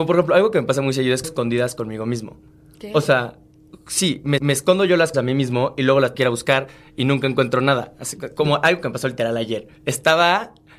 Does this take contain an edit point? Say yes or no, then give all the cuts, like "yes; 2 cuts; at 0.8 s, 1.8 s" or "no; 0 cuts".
yes; 5 cuts; at 1.2 s, 4.4 s, 5.1 s, 6.1 s, 9.8 s